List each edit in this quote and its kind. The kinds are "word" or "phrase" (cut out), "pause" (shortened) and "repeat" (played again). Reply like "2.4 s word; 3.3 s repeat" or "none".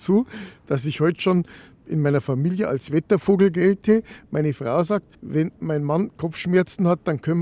5.1 s pause